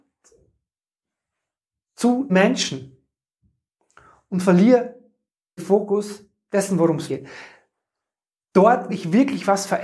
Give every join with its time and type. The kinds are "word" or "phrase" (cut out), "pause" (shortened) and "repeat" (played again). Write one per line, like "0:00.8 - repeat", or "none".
0:02.3 - word
0:05.6 - word
0:07.1 - word
0:08.9 - word